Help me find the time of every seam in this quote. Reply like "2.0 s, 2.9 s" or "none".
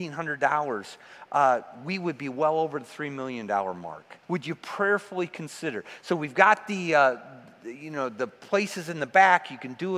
4.2 s